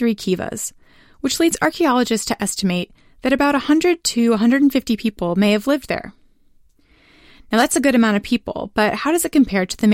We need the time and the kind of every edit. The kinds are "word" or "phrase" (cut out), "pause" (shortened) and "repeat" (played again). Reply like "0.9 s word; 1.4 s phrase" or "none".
none